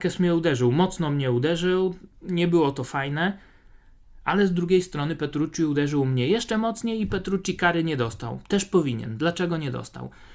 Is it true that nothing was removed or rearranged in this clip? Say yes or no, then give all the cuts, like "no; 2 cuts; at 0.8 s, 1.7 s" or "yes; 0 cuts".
yes; 0 cuts